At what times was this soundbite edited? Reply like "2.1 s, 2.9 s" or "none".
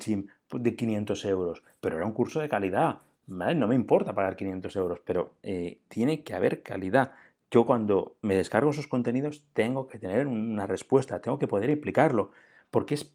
none